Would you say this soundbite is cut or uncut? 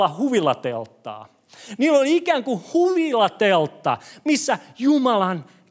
uncut